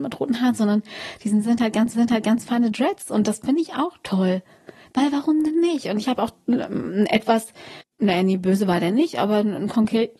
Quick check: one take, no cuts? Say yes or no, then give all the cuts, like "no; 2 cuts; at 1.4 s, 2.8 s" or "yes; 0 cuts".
no; 2 cuts; at 1.9 s, 7.8 s